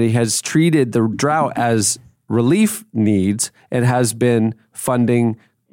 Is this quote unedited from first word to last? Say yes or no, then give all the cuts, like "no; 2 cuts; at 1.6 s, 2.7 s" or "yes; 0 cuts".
yes; 0 cuts